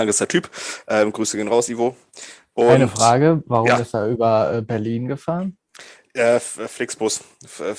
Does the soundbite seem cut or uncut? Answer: uncut